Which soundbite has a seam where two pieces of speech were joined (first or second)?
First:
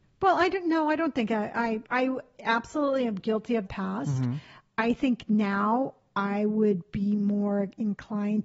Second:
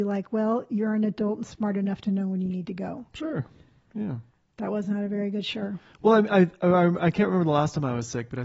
first